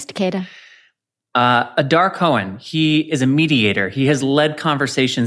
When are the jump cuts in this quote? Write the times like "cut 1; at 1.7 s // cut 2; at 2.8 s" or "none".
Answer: none